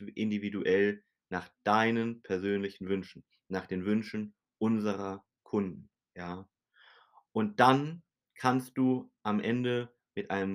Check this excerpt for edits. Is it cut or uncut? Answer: uncut